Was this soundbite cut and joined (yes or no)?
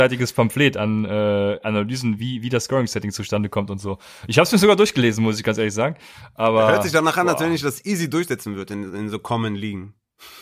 no